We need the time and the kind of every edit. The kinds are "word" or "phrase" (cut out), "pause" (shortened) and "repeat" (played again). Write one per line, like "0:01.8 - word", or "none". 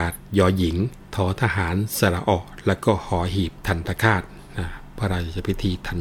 0:01.0 - pause